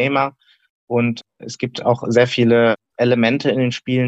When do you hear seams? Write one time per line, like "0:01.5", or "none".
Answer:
0:01.3
0:02.9